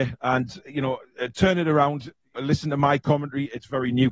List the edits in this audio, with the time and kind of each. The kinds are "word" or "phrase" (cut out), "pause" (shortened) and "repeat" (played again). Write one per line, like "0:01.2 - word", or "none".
0:02.4 - word